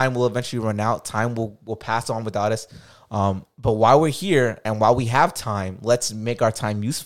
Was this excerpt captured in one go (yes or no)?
yes